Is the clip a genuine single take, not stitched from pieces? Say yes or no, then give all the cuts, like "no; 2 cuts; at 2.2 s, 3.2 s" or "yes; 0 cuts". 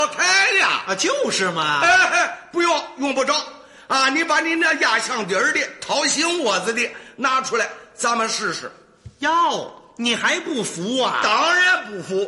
yes; 0 cuts